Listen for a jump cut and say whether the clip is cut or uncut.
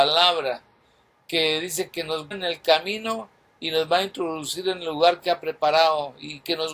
cut